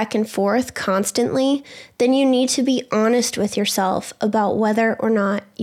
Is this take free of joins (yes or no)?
yes